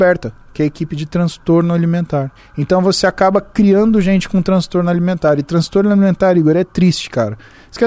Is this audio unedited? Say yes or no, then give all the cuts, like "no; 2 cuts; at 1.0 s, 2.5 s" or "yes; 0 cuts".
no; 1 cut; at 2.4 s